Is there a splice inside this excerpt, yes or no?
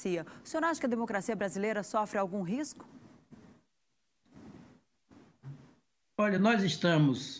no